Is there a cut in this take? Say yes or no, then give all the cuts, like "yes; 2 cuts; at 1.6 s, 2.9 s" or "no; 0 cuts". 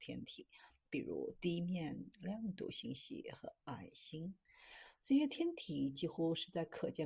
yes; 1 cut; at 3.6 s